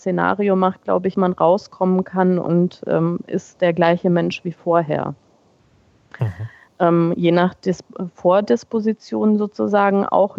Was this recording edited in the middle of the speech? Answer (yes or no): yes